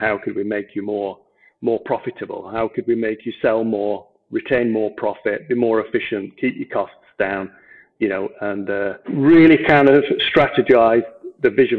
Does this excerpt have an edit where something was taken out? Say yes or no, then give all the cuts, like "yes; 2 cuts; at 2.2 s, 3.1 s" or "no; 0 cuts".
no; 0 cuts